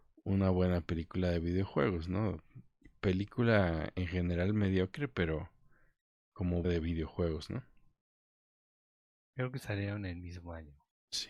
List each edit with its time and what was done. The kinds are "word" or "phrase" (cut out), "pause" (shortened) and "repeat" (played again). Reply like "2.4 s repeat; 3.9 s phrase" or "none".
6.6 s word